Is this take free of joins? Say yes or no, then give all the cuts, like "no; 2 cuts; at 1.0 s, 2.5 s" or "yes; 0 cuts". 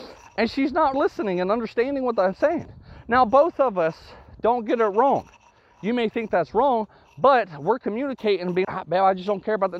no; 2 cuts; at 0.9 s, 8.6 s